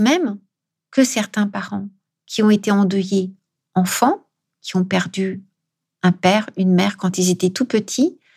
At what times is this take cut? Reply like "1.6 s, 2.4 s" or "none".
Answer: none